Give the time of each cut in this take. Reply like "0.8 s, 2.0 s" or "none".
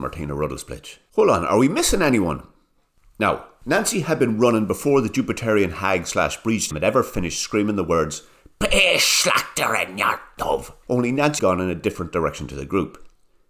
6.7 s, 11.4 s